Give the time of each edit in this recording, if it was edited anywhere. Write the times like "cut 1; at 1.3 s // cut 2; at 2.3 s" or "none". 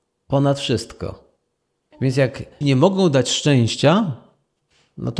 cut 1; at 2.6 s